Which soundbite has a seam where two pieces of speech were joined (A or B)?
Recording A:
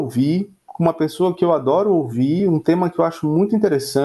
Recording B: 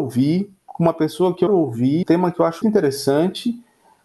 B